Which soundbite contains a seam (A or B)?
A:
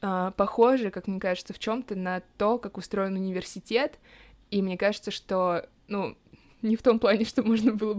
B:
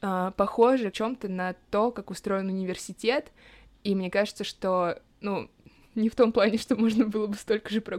B